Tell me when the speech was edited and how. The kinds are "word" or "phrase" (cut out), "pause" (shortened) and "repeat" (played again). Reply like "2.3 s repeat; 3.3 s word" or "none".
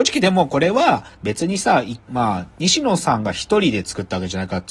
1.1 s pause; 2.0 s pause